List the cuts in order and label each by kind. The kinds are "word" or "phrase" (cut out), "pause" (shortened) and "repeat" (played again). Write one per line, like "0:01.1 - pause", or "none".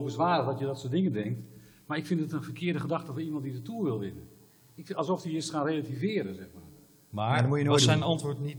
none